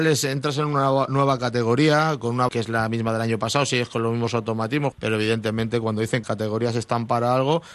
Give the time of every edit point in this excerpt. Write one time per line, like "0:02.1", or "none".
0:02.5
0:04.9
0:06.2